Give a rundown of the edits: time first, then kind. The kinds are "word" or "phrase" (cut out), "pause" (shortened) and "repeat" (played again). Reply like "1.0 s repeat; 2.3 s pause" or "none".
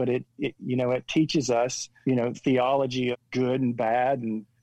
2.0 s word; 2.3 s word; 3.1 s word